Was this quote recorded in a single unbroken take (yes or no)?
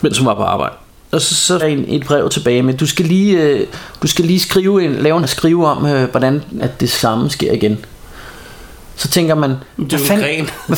no